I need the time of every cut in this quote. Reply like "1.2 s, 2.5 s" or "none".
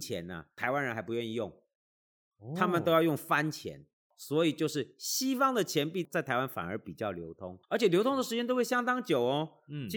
7.6 s